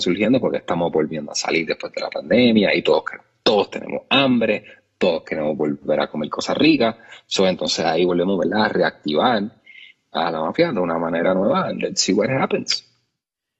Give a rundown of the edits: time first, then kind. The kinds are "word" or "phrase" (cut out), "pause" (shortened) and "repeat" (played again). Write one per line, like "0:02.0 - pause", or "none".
none